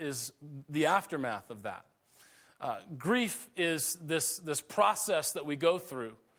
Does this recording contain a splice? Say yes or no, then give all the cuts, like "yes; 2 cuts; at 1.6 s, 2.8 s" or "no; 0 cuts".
no; 0 cuts